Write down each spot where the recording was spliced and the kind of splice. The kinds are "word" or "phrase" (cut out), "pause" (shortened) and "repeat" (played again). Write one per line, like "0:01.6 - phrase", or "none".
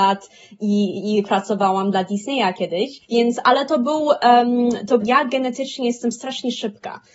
0:03.0 - pause
0:05.0 - phrase